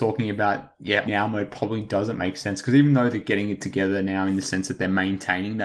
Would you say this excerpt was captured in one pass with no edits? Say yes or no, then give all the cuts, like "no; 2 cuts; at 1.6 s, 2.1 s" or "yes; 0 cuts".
no; 1 cut; at 1.1 s